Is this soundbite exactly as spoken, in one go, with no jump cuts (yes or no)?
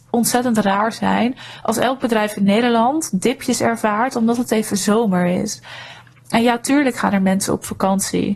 yes